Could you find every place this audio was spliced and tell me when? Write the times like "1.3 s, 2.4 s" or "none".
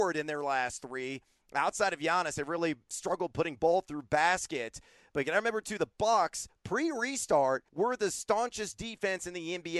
7.7 s